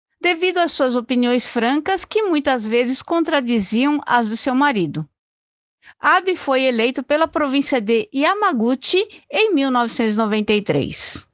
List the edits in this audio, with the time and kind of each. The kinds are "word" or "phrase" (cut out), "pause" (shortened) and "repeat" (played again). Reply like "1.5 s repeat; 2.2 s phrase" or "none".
none